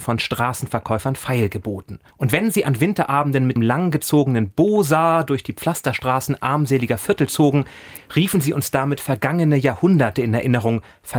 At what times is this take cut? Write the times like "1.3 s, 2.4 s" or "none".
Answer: 2.1 s, 3.6 s